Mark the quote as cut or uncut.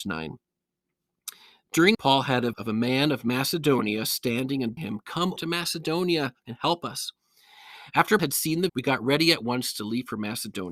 cut